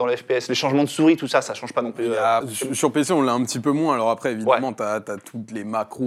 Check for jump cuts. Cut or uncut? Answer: cut